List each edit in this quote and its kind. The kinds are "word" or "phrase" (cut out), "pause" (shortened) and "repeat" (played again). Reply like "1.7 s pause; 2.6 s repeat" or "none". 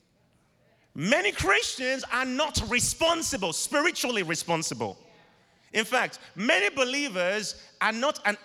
none